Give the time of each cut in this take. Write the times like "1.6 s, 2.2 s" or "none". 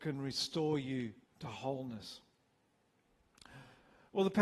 1.2 s